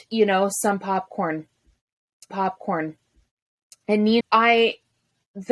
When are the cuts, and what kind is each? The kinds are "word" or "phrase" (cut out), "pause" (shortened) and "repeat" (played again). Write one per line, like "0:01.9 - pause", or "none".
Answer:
0:02.3 - repeat
0:04.2 - word